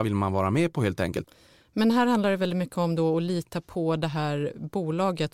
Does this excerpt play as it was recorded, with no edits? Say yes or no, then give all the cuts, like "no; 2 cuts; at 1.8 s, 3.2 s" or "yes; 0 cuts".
yes; 0 cuts